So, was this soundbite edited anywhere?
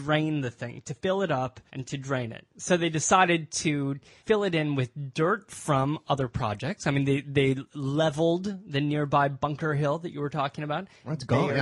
no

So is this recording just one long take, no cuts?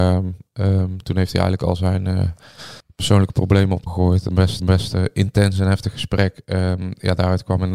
no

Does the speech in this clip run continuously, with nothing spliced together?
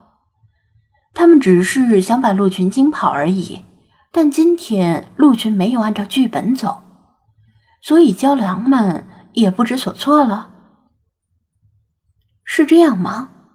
yes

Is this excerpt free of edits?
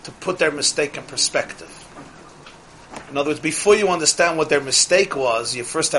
yes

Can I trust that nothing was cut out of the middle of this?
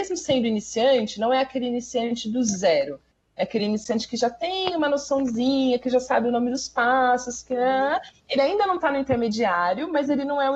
yes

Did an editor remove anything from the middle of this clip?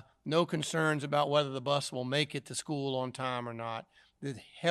no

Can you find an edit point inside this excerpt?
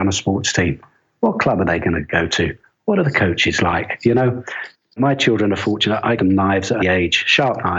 yes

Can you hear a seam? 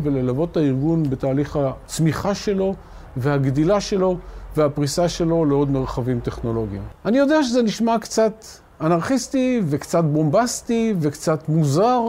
no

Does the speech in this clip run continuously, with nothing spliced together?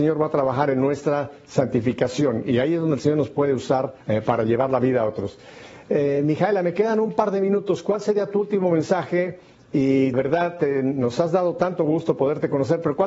no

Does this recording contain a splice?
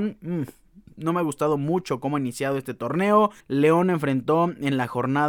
yes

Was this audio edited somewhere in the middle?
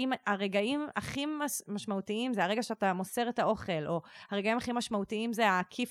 no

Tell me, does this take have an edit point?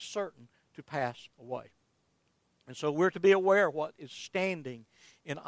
yes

